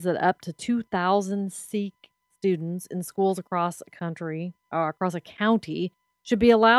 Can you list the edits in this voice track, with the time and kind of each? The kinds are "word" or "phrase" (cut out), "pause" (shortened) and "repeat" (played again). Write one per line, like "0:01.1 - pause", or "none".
none